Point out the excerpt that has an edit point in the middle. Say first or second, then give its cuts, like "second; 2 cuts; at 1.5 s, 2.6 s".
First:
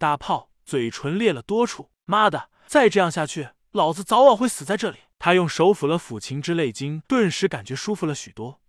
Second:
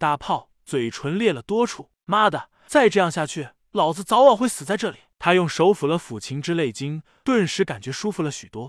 first; 1 cut; at 7.1 s